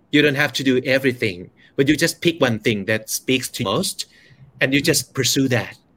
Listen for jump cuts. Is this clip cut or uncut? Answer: cut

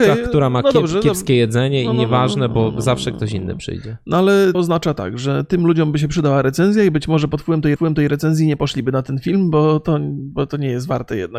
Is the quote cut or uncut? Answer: cut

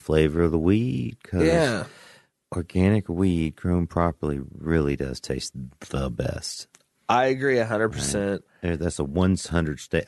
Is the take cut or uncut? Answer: uncut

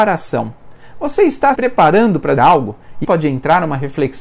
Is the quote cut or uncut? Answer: cut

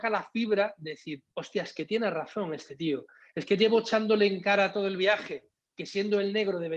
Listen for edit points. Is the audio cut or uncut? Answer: cut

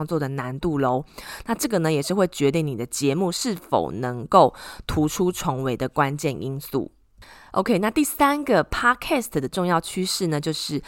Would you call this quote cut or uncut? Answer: uncut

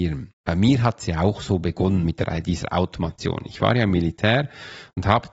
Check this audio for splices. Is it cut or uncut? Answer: uncut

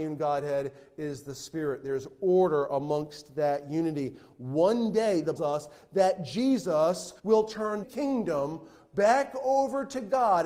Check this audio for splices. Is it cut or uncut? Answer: cut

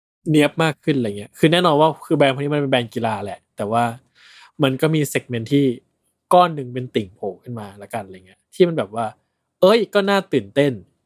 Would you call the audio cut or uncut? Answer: cut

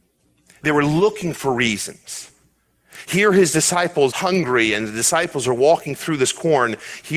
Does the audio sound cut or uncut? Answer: cut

